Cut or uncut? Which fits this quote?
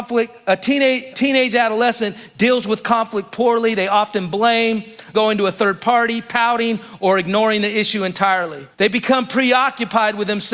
cut